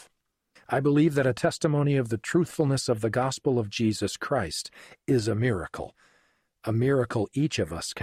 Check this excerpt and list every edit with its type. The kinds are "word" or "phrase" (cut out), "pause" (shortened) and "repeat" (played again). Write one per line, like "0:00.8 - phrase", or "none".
none